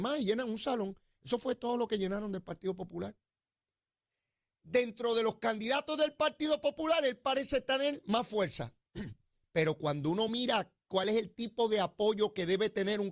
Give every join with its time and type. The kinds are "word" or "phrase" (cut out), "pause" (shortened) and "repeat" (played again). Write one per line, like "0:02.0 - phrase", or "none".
none